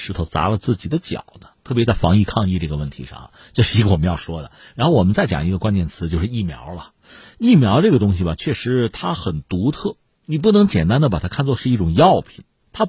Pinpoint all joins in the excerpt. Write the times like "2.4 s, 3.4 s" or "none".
none